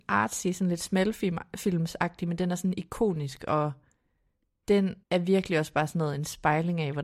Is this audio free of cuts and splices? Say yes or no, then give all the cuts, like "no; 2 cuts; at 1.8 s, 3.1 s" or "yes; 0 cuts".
no; 1 cut; at 5.0 s